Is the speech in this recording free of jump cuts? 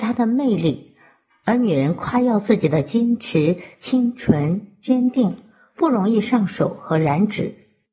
yes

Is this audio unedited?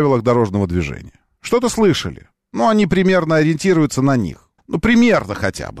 no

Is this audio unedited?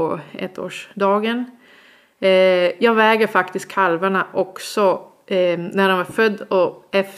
yes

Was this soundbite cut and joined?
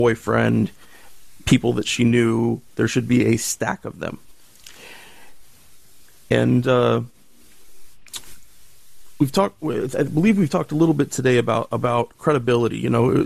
no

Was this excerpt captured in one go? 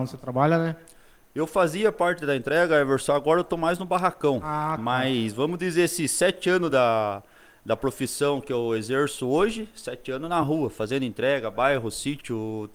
yes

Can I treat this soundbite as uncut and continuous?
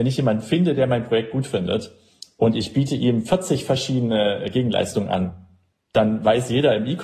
yes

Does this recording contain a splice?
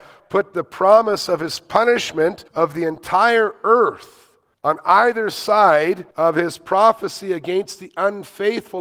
yes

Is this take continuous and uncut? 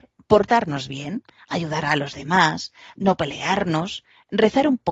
yes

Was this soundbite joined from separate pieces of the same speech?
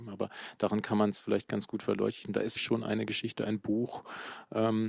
yes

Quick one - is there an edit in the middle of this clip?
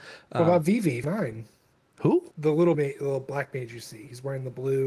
yes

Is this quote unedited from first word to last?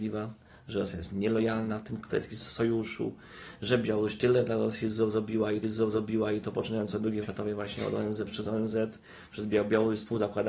no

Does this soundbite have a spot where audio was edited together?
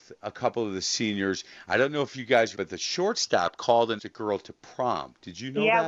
yes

